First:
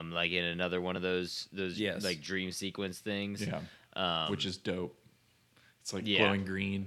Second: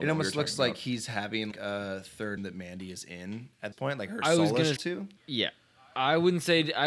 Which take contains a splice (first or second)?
second